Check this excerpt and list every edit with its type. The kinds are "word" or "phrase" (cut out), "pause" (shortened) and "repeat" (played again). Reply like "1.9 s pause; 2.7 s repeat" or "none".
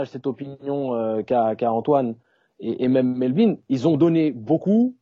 none